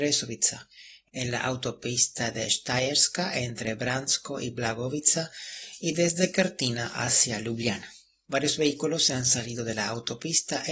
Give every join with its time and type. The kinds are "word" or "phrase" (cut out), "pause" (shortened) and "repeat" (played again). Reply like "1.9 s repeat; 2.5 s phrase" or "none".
none